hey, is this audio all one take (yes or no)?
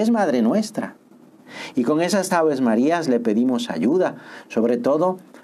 no